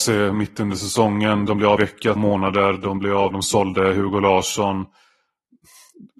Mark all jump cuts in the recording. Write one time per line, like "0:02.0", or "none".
0:01.8
0:02.2
0:03.3